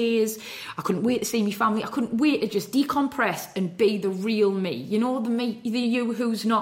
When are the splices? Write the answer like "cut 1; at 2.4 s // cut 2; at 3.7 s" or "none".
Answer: none